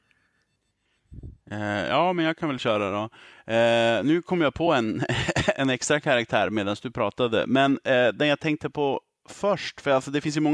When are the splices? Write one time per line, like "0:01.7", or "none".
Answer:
none